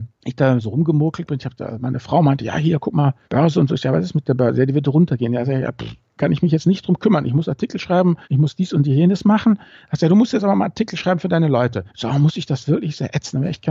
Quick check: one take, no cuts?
no; 3 cuts; at 3.2 s, 8.2 s, 11.9 s

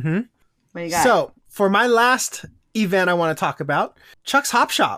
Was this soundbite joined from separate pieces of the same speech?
no; 0 cuts

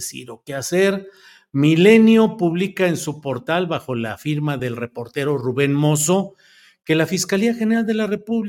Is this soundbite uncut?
yes; 0 cuts

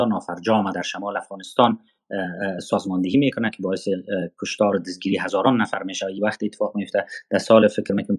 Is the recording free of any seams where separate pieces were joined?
yes; 0 cuts

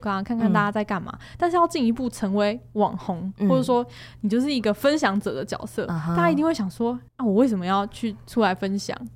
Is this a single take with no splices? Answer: no; 1 cut; at 7.1 s

